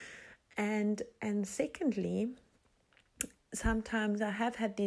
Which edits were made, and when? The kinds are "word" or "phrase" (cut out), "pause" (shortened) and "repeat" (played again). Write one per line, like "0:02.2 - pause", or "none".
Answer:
none